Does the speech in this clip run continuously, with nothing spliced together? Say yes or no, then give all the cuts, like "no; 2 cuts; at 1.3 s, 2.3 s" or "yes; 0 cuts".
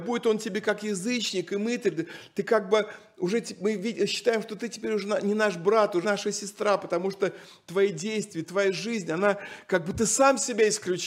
no; 1 cut; at 6.0 s